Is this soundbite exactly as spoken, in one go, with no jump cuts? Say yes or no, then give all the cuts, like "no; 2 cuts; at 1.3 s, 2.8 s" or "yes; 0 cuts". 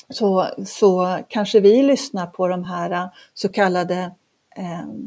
yes; 0 cuts